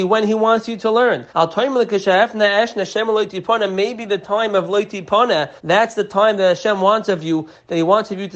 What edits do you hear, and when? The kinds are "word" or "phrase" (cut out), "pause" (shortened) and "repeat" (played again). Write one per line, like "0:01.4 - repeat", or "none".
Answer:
0:01.3 - pause
0:05.6 - pause